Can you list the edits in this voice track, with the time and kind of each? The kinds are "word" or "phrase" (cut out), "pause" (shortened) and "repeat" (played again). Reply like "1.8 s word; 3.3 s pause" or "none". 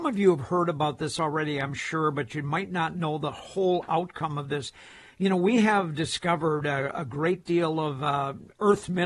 none

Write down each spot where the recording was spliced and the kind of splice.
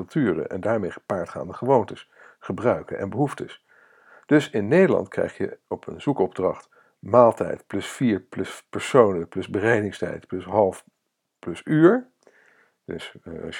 none

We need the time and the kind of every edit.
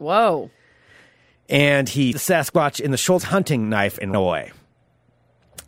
2.1 s word; 3.2 s word; 4.1 s word

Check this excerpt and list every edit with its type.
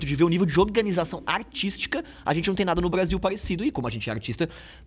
none

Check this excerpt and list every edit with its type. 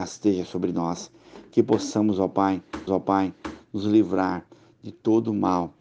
2.9 s repeat

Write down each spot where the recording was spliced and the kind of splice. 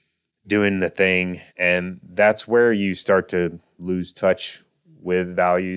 1.5 s pause

